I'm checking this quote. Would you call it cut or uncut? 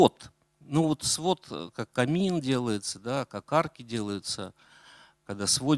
uncut